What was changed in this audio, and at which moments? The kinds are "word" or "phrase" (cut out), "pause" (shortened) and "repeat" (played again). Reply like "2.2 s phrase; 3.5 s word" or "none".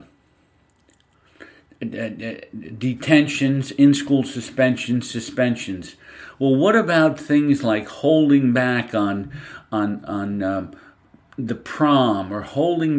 none